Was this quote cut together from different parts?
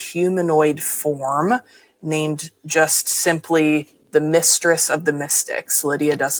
no; 0 cuts

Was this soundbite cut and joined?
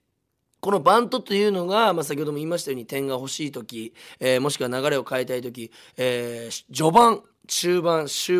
no; 0 cuts

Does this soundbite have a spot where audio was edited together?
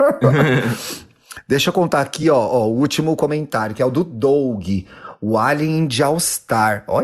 no; 0 cuts

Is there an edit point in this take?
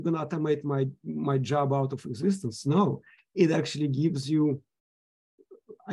no; 0 cuts

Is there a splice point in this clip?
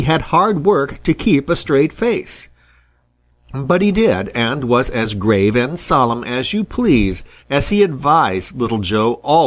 no; 0 cuts

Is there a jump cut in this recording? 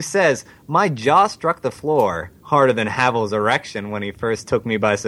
yes; 1 cut; at 2.4 s

